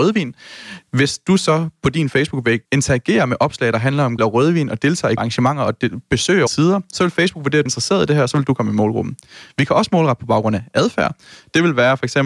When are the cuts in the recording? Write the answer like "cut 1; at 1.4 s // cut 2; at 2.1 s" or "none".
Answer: cut 1; at 2.6 s // cut 2; at 4.2 s // cut 3; at 5.2 s // cut 4; at 6.5 s // cut 5; at 7.7 s